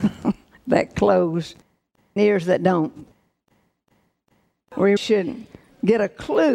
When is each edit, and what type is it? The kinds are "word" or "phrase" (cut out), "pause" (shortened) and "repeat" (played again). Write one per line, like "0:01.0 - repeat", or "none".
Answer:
0:02.2 - word
0:05.0 - word